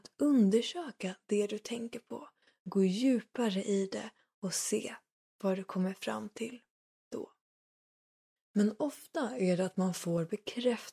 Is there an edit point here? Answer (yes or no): no